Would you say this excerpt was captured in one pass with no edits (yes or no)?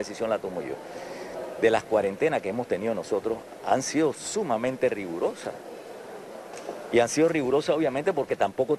yes